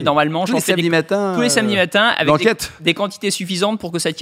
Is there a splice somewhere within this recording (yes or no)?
no